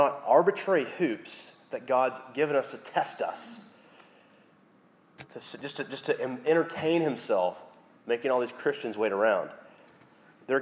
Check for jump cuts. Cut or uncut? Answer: uncut